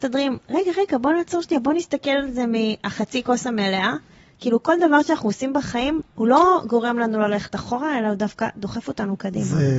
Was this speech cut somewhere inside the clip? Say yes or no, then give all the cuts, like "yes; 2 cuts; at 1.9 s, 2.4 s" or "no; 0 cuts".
no; 0 cuts